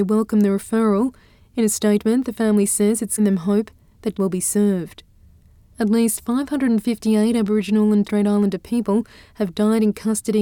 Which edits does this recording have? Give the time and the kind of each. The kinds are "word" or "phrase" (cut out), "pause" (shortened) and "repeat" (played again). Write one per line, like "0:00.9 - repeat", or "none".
0:03.2 - word
0:04.1 - word
0:08.0 - word

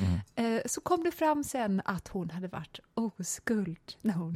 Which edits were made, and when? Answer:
none

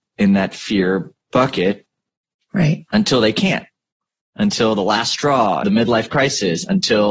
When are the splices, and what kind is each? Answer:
0:05.6 - word

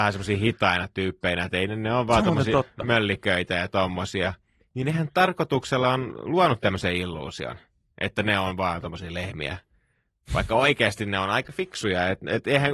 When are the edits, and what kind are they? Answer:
none

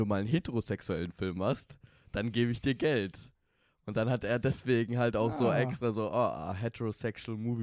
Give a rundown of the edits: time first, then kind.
none

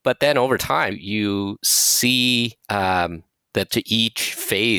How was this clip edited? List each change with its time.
0:00.9 - word
0:02.6 - pause
0:03.7 - phrase

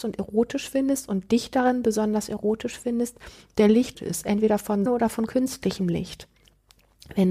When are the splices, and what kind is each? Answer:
0:03.9 - word
0:04.9 - word

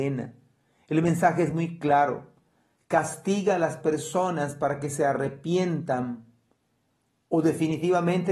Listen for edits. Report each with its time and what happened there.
none

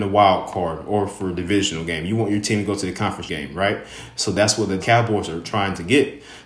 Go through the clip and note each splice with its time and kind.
0:03.3 - word
0:04.8 - word

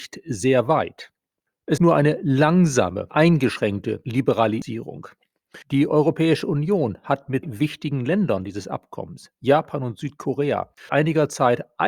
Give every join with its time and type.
0:01.8 - word
0:03.1 - word
0:05.6 - pause
0:07.4 - word
0:10.9 - word

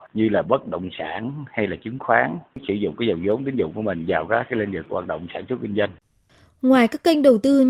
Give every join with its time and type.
none

